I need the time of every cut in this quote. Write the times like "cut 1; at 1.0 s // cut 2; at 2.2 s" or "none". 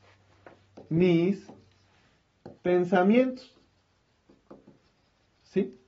cut 1; at 2.6 s